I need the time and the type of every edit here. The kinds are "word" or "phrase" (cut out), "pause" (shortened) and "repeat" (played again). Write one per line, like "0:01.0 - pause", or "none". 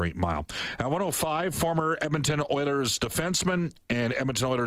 none